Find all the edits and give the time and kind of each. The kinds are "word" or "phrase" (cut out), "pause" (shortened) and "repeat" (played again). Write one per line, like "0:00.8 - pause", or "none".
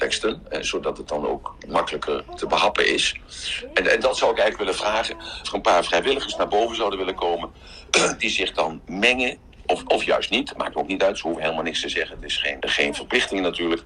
0:05.4 - word
0:12.6 - word

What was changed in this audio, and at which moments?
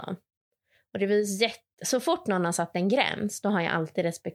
none

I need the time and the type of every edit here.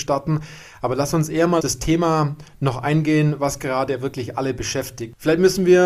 0:01.6 - word

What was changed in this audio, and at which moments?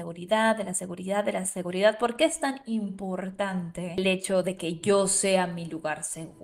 none

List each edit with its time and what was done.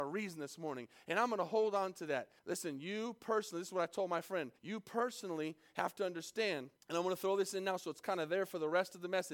0:02.4 - pause
0:04.6 - pause
0:06.8 - pause

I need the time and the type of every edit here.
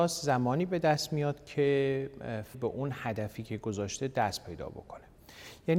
0:02.5 - phrase

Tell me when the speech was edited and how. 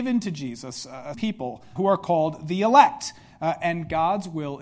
0:01.1 - word
0:01.8 - word

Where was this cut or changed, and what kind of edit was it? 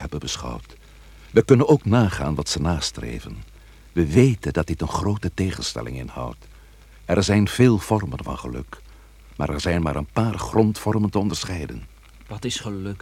none

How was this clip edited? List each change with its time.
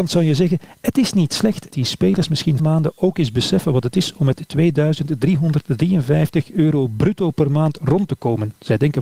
0:01.7 - word
0:02.6 - phrase

